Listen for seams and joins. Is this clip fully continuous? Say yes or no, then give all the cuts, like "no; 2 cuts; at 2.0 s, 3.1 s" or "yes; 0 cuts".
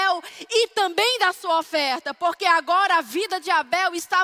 yes; 0 cuts